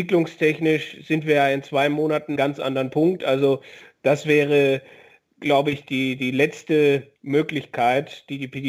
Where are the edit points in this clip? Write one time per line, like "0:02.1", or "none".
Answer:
0:02.4
0:07.2